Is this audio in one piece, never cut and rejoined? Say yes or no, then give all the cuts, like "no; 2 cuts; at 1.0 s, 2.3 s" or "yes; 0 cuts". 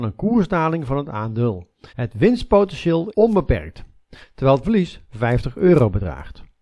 no; 3 cuts; at 1.9 s, 3.1 s, 4.6 s